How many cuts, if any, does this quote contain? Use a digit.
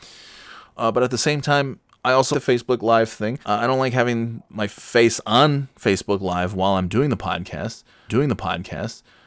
3